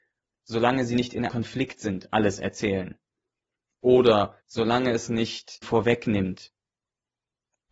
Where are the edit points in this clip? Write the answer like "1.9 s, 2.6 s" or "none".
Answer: 1.3 s, 4.4 s, 5.6 s